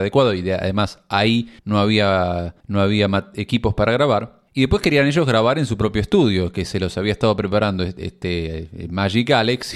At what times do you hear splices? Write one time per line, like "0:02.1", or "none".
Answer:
0:01.6
0:02.6
0:04.5